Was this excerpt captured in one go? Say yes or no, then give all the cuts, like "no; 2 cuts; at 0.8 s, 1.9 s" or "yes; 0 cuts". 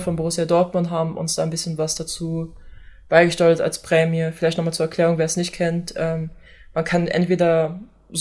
yes; 0 cuts